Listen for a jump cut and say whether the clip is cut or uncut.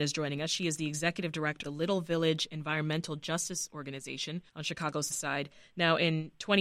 cut